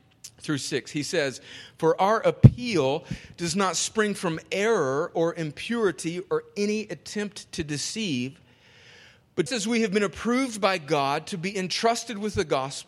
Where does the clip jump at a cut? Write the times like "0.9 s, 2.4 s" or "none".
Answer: 9.5 s